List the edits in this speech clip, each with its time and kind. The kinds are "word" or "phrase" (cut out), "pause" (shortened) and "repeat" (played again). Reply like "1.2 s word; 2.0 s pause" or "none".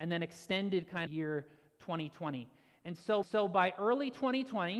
1.1 s phrase; 3.2 s repeat